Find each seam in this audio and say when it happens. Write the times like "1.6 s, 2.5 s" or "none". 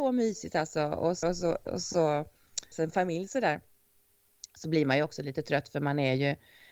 1.2 s, 2.7 s